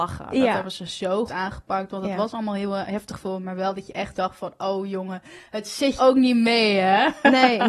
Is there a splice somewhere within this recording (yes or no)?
yes